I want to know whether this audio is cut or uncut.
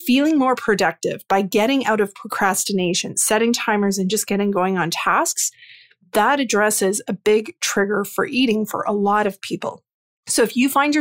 uncut